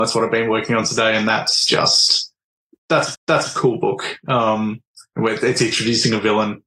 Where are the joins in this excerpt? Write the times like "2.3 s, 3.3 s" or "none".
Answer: 3.1 s